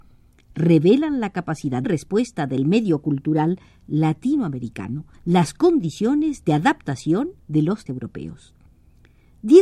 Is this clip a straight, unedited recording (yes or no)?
no